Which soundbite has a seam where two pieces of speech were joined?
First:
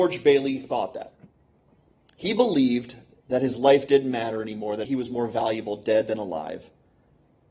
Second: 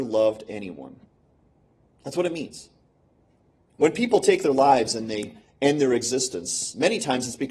first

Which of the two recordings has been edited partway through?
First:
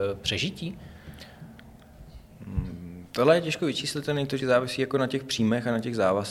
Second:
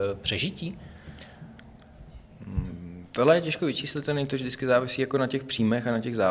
first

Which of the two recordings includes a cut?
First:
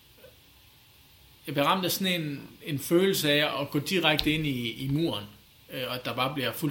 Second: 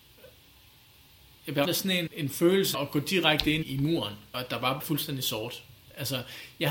second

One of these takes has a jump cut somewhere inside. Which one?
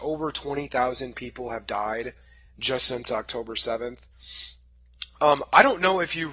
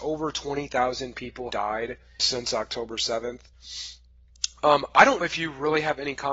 second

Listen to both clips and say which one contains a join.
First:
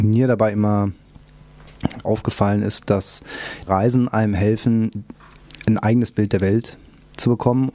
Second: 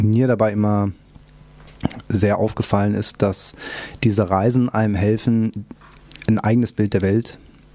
first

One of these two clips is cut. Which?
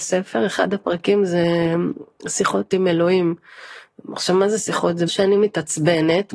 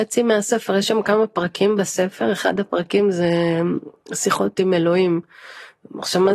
first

